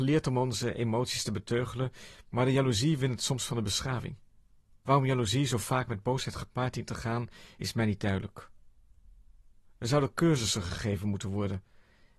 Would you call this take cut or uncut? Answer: uncut